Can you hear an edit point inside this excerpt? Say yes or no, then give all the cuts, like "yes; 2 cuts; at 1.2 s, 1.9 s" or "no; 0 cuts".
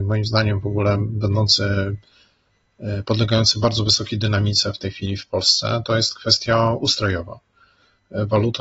no; 0 cuts